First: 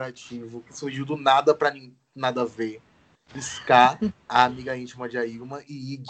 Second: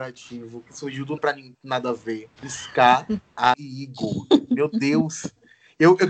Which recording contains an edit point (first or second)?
second